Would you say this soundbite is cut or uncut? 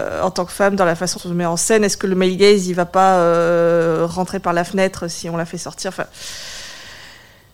cut